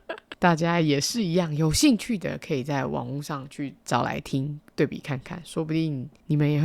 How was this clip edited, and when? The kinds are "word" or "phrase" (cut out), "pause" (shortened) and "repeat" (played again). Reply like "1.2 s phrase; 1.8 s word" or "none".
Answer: 3.8 s pause

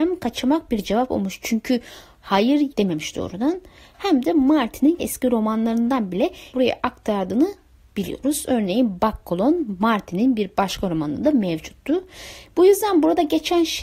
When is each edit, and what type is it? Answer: 2.7 s phrase; 5.0 s word; 6.5 s phrase

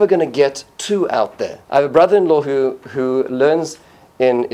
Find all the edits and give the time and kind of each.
1.6 s pause

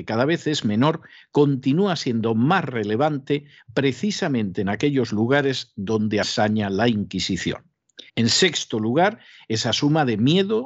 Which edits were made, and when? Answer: 6.2 s phrase; 8.1 s pause

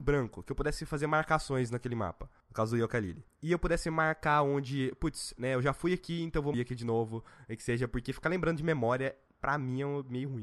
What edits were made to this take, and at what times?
6.5 s phrase

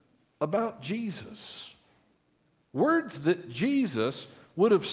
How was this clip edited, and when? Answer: none

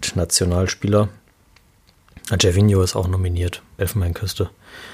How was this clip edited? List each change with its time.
3.8 s word

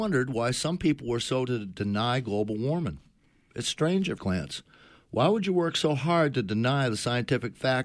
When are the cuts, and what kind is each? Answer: 1.5 s word; 4.2 s word

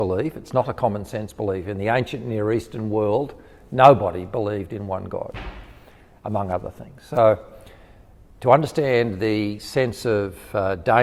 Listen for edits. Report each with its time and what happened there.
none

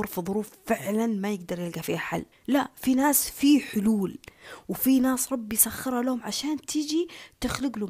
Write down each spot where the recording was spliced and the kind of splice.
2.3 s pause

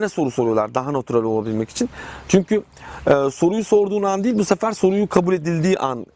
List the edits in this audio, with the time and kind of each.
none

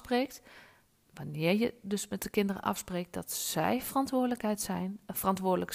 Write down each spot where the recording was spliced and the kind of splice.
none

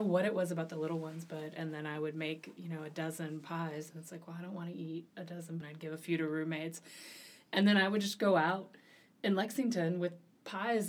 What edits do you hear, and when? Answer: 5.6 s phrase

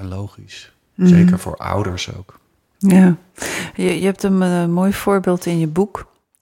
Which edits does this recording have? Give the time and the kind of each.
none

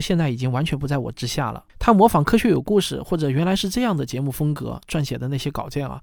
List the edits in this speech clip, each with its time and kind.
1.7 s pause

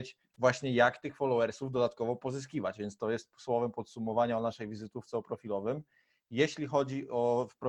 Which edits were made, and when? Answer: none

